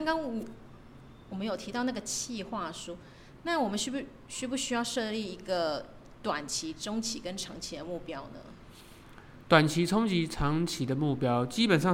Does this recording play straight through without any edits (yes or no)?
yes